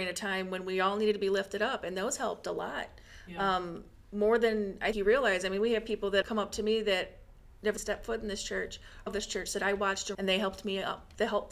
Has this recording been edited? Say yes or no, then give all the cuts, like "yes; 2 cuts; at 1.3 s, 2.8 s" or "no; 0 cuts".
yes; 5 cuts; at 4.9 s, 6.2 s, 7.8 s, 9.1 s, 10.1 s